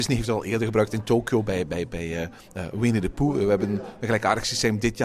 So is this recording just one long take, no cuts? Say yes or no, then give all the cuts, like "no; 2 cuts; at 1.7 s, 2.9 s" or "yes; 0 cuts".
yes; 0 cuts